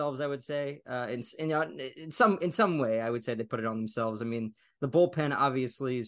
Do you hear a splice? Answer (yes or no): no